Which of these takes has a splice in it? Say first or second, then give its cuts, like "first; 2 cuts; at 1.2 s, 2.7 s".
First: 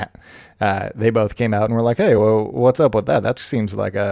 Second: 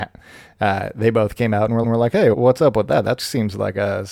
second; 2 cuts; at 1.8 s, 2.3 s